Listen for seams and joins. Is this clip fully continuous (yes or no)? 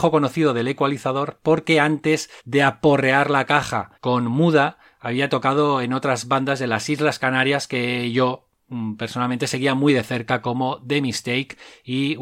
no